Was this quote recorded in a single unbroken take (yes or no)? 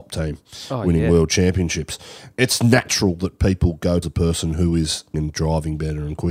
no